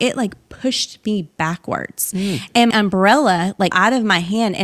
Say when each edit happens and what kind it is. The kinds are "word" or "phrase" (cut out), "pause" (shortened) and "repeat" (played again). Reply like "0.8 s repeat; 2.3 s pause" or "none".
2.7 s word; 3.7 s word